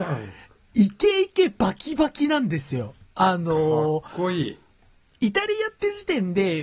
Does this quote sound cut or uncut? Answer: uncut